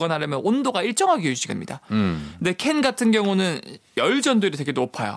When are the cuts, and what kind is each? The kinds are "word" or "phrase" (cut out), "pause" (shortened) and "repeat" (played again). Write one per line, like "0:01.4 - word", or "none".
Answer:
0:01.5 - word

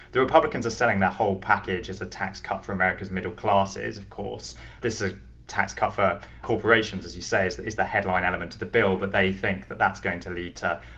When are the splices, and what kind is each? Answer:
none

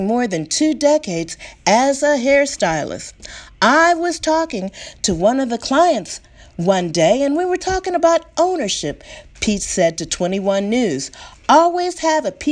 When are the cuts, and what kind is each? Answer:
none

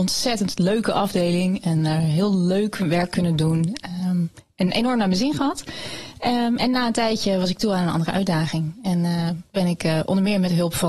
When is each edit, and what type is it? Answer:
none

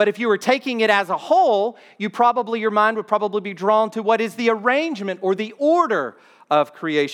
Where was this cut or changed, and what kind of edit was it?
none

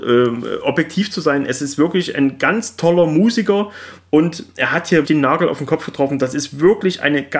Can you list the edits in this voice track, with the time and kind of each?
0:05.0 - word

